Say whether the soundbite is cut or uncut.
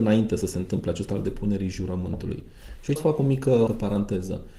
cut